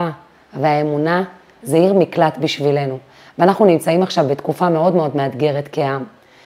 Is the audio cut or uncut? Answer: uncut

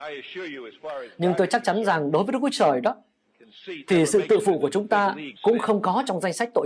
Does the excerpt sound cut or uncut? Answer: cut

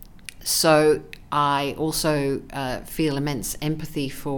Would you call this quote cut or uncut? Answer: uncut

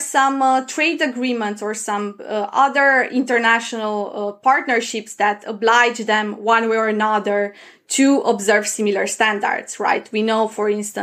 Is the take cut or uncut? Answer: uncut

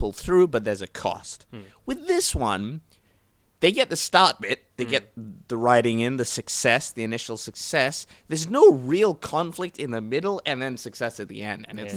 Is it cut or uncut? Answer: uncut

